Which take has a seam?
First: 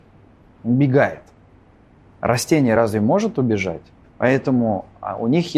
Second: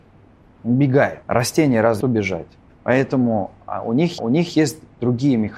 second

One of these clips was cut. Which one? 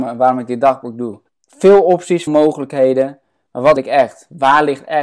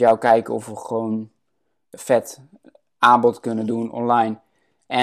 first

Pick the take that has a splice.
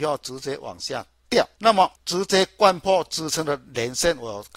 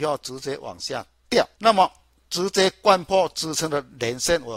first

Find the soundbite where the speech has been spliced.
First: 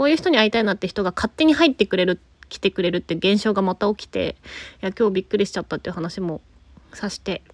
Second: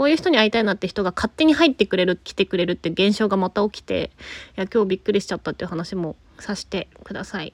second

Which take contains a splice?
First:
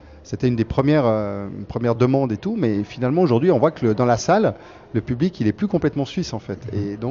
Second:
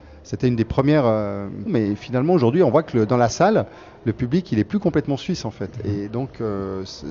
second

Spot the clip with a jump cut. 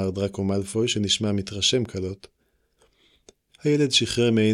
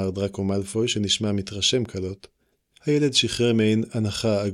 second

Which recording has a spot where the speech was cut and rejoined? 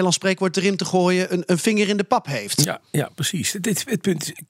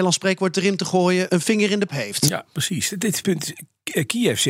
second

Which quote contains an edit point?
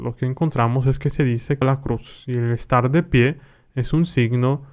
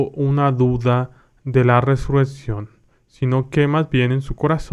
first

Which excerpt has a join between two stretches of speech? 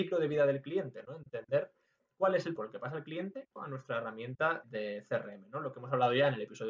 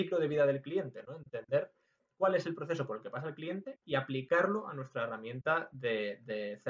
first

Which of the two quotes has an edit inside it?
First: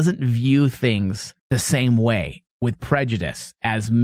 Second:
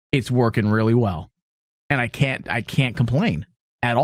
first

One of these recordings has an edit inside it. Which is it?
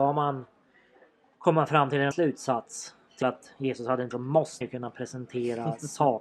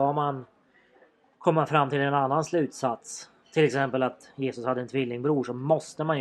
first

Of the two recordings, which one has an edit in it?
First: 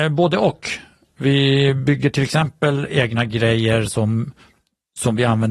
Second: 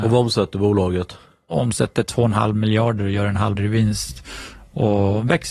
second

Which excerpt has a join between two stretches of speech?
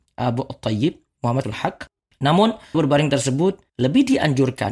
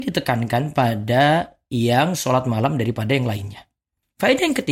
first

